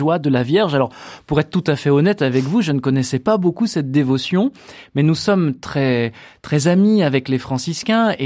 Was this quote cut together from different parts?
no; 0 cuts

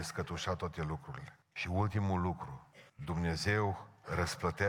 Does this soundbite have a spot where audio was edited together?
yes; 2 cuts; at 1.4 s, 2.9 s

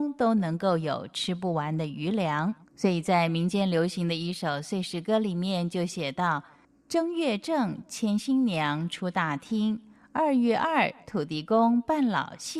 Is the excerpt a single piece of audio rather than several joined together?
no; 1 cut; at 2.6 s

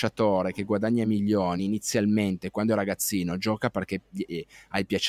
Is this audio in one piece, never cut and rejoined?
yes; 0 cuts

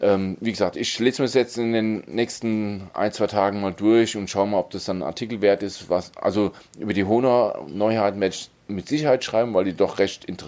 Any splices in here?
no; 0 cuts

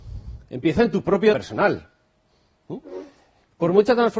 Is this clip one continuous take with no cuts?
no; 1 cut; at 1.3 s

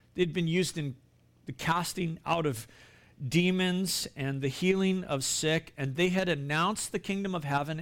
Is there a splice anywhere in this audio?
no; 0 cuts

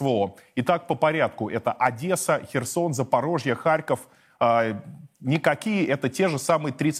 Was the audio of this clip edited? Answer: no; 0 cuts

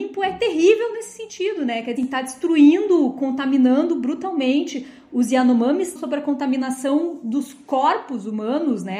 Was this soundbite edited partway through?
yes; 2 cuts; at 2.0 s, 6.0 s

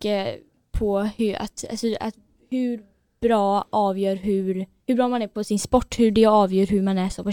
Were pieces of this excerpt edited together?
no; 0 cuts

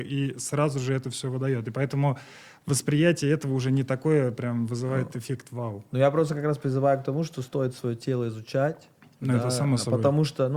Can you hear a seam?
no; 0 cuts

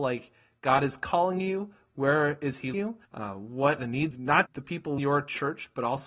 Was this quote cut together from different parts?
yes; 6 cuts; at 2.7 s, 3.1 s, 3.8 s, 4.1 s, 4.5 s, 5.0 s

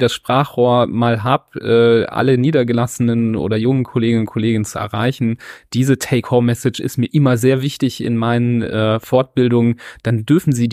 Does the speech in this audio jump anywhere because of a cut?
no; 0 cuts

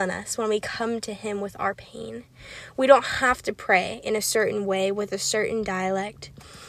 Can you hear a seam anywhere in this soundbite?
no; 0 cuts

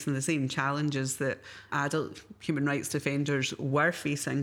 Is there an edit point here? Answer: yes; 1 cut; at 1.7 s

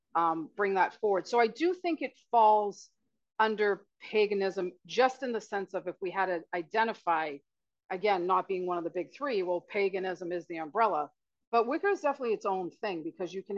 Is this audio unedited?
yes; 0 cuts

